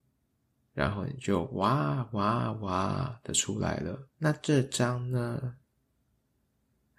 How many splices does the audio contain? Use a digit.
1